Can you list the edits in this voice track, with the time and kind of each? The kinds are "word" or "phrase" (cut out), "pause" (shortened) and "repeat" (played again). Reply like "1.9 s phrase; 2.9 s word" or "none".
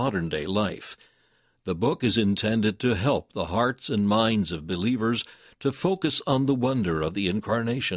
none